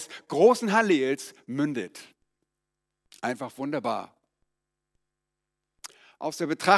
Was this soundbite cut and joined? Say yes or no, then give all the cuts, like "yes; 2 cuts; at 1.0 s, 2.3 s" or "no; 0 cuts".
no; 0 cuts